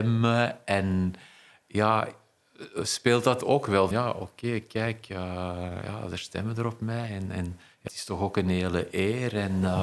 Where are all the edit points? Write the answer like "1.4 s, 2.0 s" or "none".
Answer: 3.4 s, 3.9 s, 7.9 s